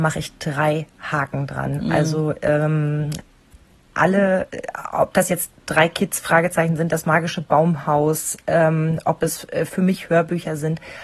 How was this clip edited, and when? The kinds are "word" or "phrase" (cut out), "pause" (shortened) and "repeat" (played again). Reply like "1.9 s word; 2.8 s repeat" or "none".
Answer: none